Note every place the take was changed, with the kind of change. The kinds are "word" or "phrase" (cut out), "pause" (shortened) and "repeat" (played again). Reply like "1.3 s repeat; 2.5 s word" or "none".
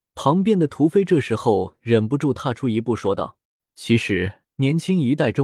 3.4 s pause; 4.5 s pause